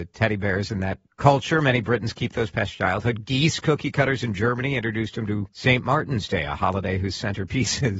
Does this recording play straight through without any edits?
no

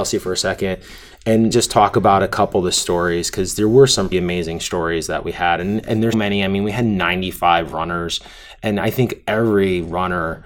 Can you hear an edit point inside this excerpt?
yes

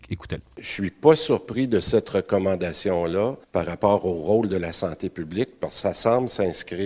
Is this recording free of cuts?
no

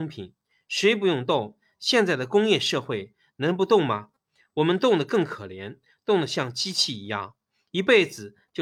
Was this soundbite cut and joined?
no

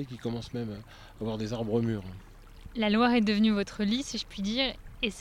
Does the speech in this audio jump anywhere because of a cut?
no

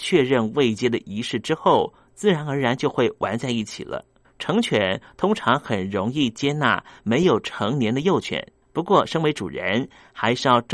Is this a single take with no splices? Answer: no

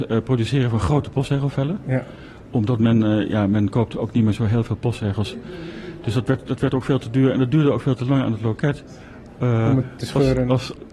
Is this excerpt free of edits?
yes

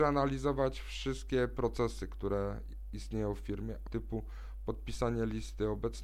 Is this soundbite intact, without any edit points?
no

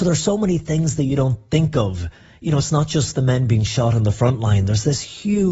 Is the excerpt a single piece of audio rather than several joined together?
yes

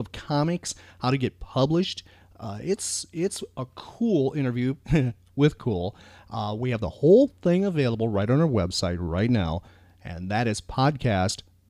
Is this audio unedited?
yes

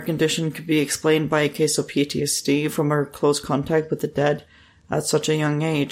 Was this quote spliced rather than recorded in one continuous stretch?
no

